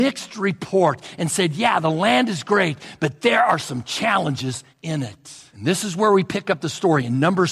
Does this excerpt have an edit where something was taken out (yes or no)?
yes